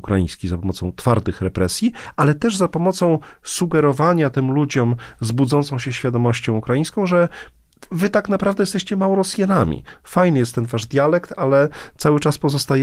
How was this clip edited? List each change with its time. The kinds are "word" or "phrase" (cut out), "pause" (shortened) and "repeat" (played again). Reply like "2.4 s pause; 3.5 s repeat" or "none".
7.7 s pause